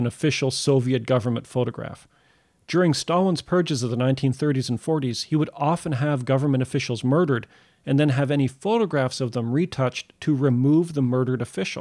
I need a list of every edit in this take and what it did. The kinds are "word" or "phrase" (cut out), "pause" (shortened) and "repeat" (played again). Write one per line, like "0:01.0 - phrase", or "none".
none